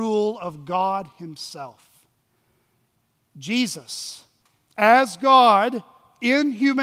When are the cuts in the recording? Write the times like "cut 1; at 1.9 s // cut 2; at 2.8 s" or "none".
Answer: cut 1; at 4.4 s